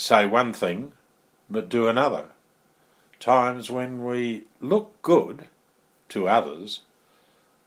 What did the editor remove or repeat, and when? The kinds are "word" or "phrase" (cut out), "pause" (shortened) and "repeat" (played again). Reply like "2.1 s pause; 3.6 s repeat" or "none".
none